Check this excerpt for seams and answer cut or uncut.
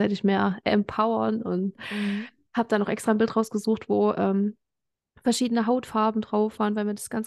uncut